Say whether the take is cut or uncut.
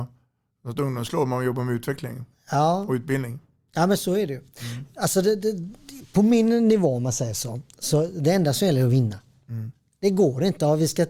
uncut